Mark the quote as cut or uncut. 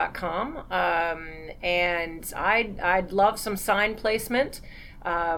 uncut